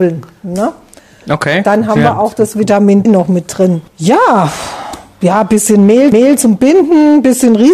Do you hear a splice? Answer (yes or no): yes